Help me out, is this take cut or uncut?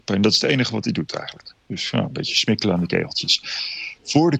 uncut